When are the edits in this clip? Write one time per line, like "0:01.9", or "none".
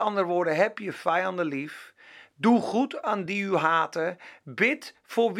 none